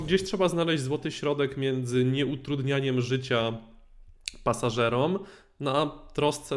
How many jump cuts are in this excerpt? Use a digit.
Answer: 0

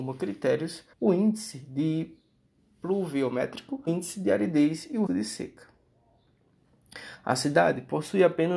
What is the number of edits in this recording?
3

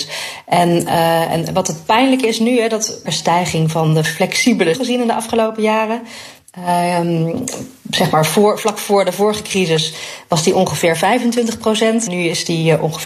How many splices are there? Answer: 3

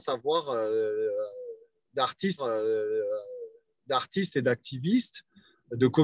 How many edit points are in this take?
1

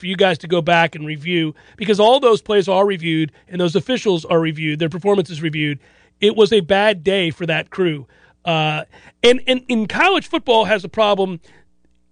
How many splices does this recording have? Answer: 0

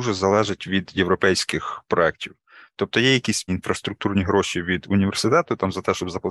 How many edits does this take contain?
1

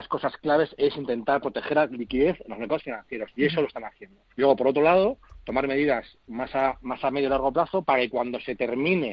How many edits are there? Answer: 1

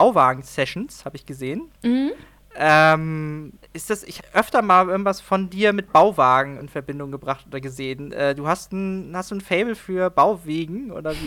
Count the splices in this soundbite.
5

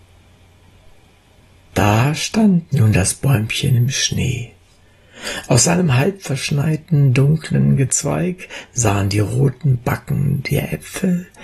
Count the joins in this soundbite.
0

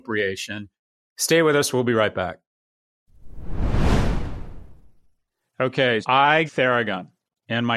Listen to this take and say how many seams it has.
2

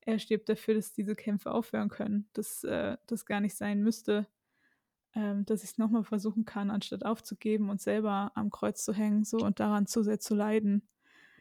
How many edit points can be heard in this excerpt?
1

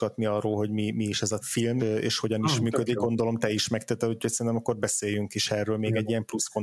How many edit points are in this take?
2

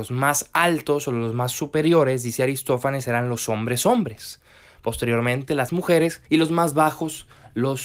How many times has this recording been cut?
2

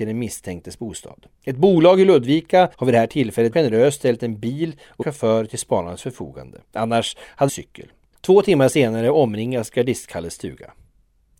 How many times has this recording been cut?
7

